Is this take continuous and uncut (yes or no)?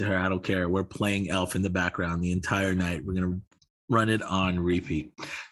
yes